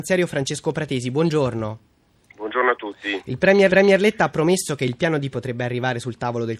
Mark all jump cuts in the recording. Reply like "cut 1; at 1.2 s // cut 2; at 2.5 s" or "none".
cut 1; at 3.7 s // cut 2; at 5.3 s